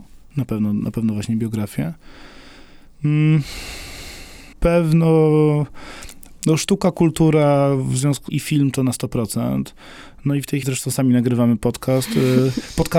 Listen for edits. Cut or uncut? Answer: cut